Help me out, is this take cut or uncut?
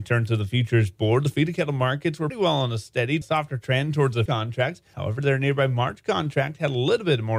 cut